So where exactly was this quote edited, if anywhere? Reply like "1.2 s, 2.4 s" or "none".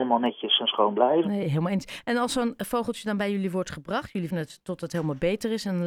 4.3 s